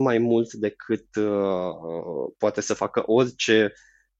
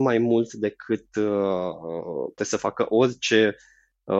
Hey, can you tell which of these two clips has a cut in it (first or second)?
second